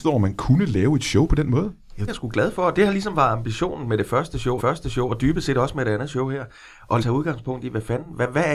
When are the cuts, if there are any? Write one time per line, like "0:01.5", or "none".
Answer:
0:02.1
0:04.6
0:07.0